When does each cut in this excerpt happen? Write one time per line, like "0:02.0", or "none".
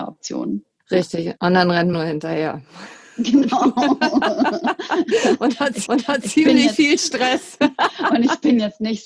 0:01.4
0:01.9
0:05.9